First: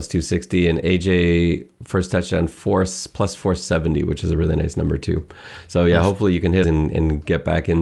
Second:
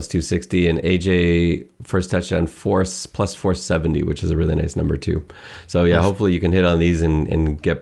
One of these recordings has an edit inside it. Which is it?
first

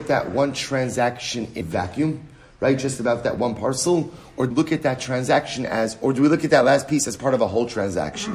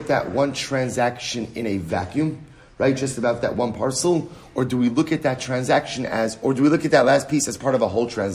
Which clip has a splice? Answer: first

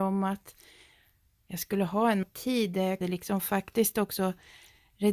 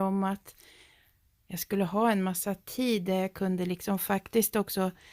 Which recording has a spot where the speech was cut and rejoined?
first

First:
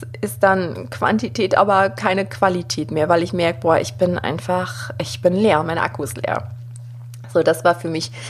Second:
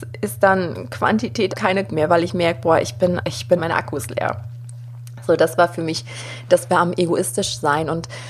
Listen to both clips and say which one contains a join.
second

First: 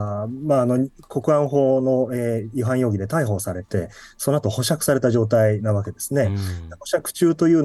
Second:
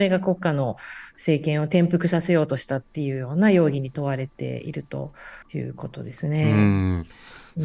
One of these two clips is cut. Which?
second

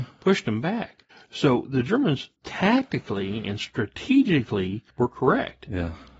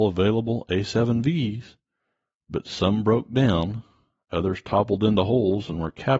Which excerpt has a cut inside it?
first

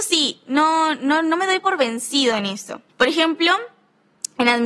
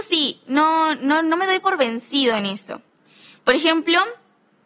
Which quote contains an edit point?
first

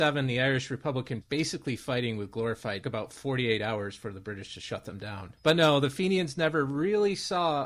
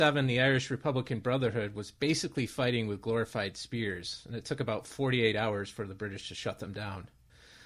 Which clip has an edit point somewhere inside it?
first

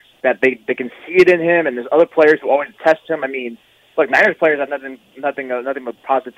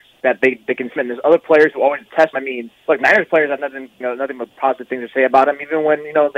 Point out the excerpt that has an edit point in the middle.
second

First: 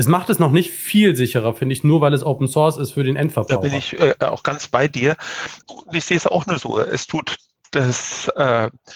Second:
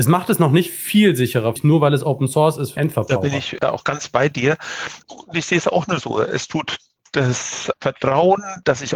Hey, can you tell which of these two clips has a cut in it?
second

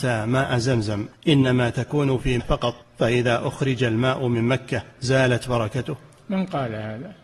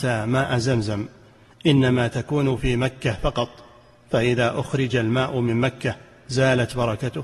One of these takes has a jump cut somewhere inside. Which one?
first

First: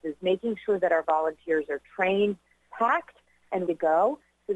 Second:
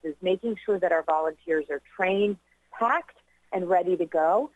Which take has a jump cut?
first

